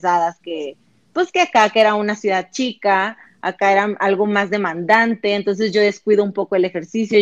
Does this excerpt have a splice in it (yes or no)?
no